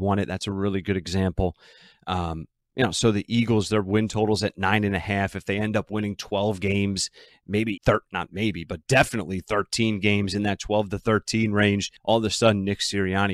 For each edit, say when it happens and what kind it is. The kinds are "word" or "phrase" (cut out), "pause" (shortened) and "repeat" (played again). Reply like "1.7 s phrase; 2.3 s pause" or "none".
7.8 s word; 12.0 s pause